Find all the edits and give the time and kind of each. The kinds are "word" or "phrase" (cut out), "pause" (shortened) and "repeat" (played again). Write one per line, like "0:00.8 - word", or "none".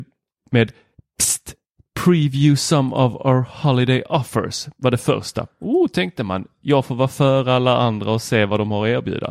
none